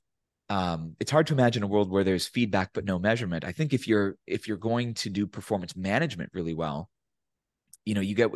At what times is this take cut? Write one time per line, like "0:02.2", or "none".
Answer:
none